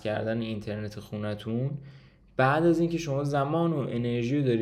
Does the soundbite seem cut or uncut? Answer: uncut